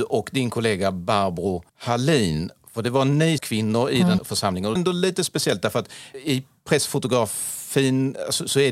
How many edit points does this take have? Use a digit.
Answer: 4